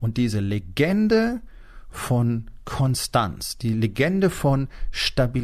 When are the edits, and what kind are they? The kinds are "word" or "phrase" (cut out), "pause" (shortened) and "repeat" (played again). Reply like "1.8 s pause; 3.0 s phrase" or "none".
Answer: none